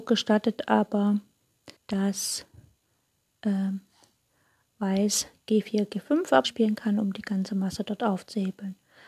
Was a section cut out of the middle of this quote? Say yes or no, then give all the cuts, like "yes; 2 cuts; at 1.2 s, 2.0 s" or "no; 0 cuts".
yes; 2 cuts; at 1.8 s, 6.4 s